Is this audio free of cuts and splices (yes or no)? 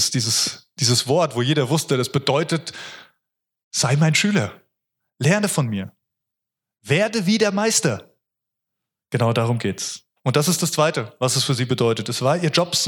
yes